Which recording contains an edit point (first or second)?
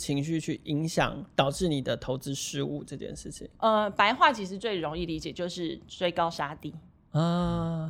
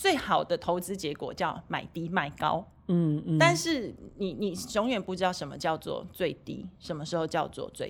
first